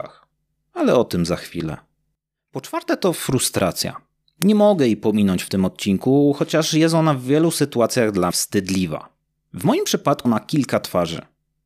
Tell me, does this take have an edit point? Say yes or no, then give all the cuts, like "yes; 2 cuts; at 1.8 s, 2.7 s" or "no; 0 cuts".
yes; 2 cuts; at 8.3 s, 10.2 s